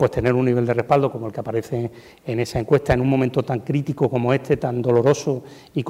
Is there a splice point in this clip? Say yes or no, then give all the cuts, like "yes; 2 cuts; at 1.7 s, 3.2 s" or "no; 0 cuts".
no; 0 cuts